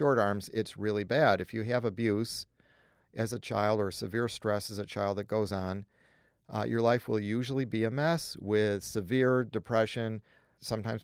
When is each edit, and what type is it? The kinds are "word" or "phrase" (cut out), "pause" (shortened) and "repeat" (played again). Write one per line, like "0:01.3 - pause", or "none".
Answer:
none